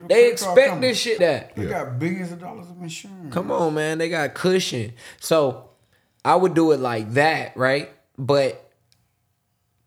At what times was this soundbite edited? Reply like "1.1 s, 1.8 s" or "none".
1.2 s